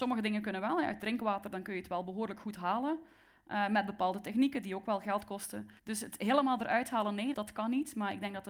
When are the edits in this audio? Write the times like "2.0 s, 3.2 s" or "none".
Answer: 5.8 s, 7.3 s